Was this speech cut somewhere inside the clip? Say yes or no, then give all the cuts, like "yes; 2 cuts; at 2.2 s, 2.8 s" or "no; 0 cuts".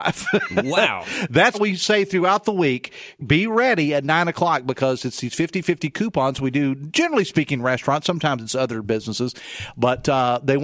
yes; 2 cuts; at 1.5 s, 3.2 s